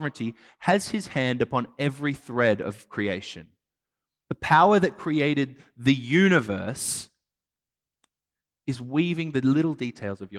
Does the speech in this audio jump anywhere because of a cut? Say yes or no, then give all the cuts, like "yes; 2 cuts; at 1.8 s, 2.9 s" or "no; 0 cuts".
no; 0 cuts